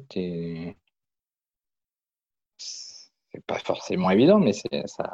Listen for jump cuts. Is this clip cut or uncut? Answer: uncut